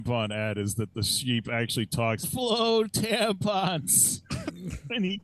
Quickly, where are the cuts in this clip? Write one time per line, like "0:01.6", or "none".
0:02.2